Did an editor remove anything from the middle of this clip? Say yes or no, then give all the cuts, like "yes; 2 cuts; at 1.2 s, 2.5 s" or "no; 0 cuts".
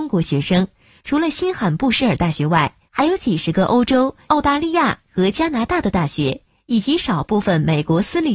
no; 0 cuts